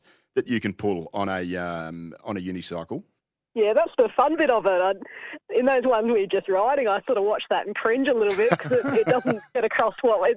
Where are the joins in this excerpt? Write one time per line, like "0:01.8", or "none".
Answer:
0:03.2